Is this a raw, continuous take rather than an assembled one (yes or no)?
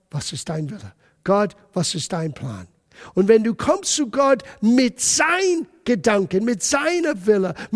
yes